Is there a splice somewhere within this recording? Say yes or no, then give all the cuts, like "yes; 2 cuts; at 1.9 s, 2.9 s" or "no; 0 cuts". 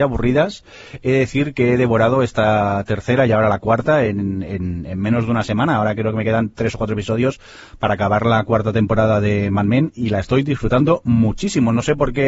no; 0 cuts